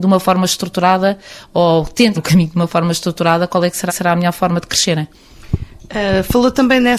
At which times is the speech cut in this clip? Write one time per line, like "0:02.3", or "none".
0:02.1
0:03.9